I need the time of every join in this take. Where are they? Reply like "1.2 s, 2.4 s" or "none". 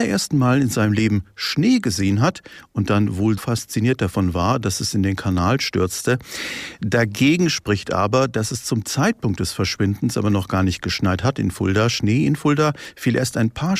3.4 s